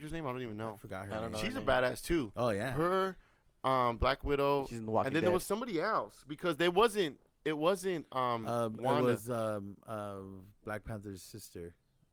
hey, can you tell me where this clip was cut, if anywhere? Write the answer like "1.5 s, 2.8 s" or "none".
none